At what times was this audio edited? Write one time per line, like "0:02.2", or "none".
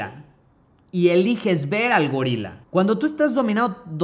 0:02.6